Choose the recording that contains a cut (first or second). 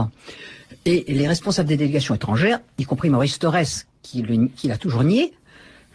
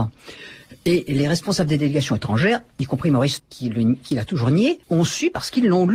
second